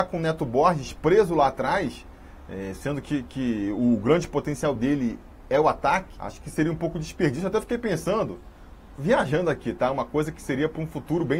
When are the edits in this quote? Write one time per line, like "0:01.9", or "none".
none